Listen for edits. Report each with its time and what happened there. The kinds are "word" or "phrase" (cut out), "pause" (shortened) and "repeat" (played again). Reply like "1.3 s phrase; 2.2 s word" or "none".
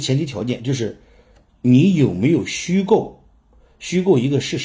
none